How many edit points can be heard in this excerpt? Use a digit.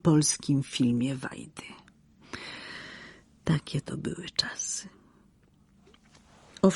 0